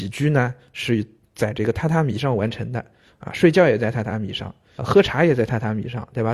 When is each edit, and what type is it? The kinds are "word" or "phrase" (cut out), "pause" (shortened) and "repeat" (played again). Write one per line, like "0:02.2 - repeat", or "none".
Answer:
0:04.8 - word